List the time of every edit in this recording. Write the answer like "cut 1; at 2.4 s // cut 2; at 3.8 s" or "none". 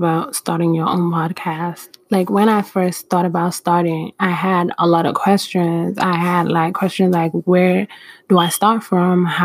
none

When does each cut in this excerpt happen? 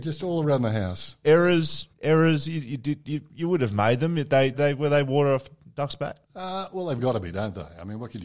cut 1; at 1.9 s // cut 2; at 4.5 s // cut 3; at 6.2 s

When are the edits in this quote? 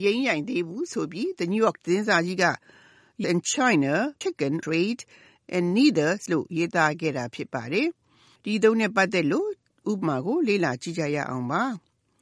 cut 1; at 1.8 s // cut 2; at 3.2 s // cut 3; at 4.2 s // cut 4; at 4.6 s // cut 5; at 6.3 s

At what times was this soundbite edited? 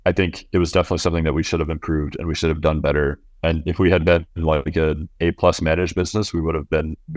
none

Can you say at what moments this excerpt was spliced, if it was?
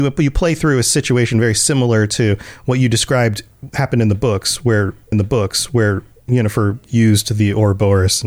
cut 1; at 5.1 s

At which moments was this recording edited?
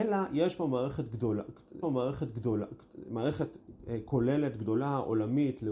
cut 1; at 1.8 s

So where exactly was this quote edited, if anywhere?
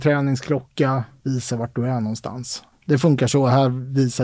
none

